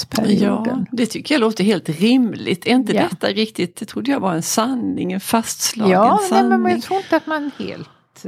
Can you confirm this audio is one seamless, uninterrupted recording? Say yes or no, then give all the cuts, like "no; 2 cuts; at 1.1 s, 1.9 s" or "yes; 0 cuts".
yes; 0 cuts